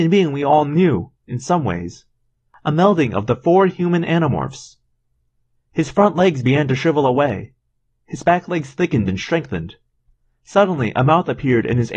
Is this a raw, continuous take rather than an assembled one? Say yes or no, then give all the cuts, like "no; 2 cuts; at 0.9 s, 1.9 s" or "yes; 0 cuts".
yes; 0 cuts